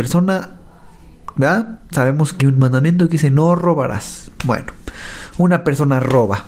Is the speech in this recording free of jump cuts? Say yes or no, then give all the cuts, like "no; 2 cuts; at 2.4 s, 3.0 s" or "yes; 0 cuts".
no; 2 cuts; at 1.3 s, 2.4 s